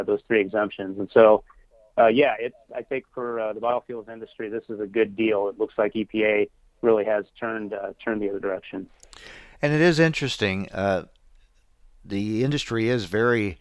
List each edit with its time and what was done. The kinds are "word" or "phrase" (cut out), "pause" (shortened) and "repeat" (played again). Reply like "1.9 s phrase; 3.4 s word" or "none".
none